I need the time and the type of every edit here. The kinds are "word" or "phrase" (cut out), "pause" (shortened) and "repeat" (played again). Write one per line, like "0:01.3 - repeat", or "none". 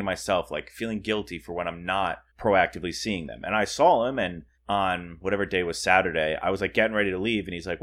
0:02.3 - pause
0:04.5 - pause